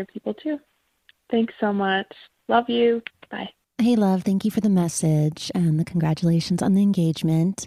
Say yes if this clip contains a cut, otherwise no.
no